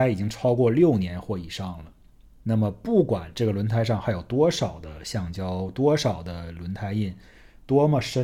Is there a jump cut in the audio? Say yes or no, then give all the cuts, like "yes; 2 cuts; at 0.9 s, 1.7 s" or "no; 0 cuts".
no; 0 cuts